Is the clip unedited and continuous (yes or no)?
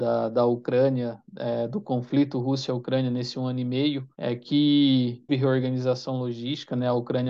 no